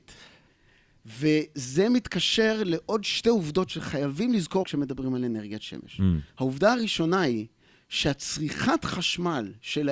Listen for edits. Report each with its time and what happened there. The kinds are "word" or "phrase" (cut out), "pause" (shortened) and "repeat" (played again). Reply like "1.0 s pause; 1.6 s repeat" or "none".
4.6 s word; 6.3 s pause